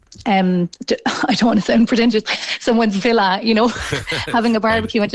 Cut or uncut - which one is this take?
uncut